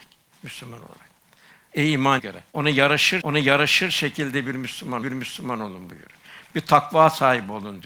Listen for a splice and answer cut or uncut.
cut